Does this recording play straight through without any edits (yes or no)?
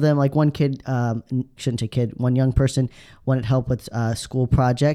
no